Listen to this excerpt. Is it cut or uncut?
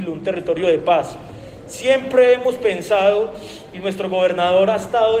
uncut